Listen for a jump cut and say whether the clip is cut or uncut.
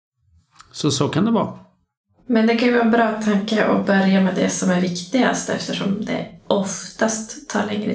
uncut